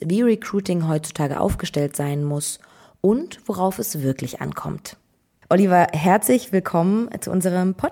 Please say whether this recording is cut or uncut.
uncut